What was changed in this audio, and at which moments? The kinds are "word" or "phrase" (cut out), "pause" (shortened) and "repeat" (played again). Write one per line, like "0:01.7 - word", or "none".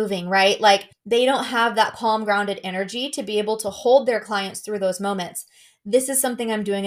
0:00.9 - pause